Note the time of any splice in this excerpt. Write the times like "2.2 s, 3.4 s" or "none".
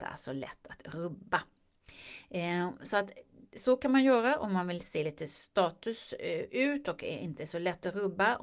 none